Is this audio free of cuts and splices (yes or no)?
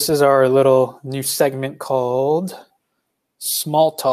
yes